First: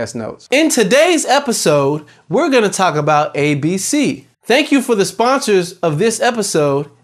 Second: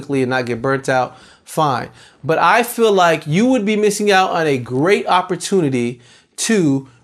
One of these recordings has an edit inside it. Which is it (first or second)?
first